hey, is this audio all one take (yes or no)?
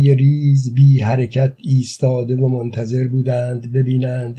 yes